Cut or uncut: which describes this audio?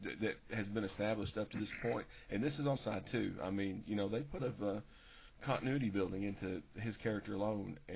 cut